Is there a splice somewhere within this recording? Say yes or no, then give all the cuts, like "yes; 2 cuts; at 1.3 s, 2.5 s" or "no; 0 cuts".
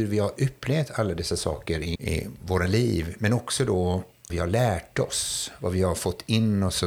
yes; 2 cuts; at 2.0 s, 4.3 s